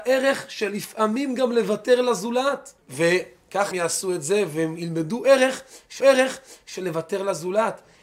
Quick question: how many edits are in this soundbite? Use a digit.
3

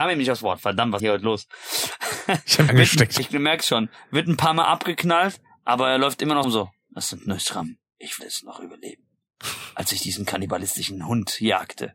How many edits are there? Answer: 5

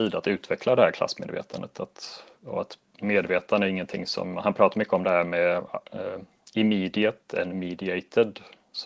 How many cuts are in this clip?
0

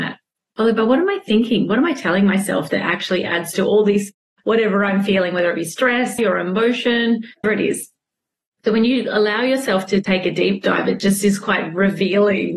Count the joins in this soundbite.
2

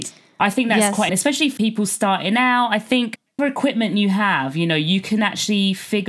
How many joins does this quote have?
3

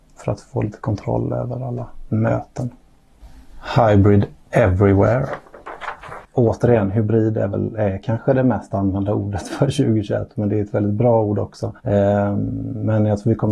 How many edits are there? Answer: 1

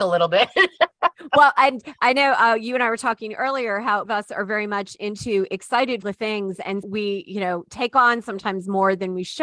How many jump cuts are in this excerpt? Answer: 3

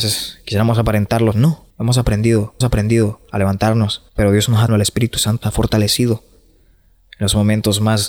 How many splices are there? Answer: 6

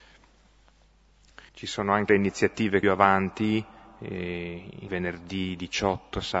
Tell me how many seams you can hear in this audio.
4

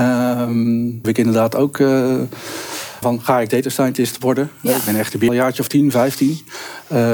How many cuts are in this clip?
3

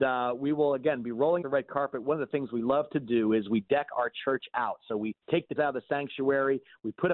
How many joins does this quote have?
3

